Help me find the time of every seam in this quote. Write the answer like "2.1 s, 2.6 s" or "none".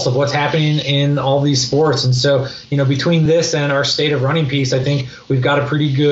none